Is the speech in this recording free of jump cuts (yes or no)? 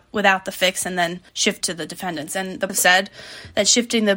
no